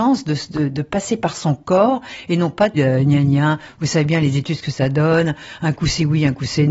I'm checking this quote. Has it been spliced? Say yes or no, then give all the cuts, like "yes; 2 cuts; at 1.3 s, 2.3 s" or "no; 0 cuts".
yes; 1 cut; at 2.8 s